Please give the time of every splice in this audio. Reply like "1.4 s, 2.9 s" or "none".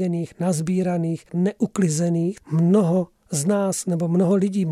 1.3 s, 2.4 s